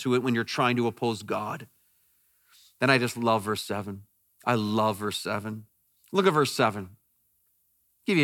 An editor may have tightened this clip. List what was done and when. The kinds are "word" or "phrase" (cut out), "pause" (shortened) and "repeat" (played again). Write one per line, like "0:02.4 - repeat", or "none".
none